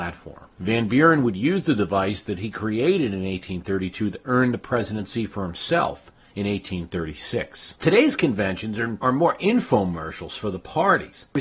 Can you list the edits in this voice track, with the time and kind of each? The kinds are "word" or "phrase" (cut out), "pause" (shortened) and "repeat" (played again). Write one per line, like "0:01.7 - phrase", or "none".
none